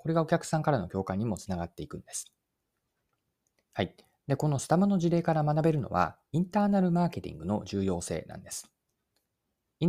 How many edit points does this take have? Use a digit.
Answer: 0